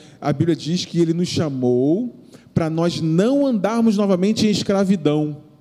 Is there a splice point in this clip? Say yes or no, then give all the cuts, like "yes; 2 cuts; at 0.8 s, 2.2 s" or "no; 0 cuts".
no; 0 cuts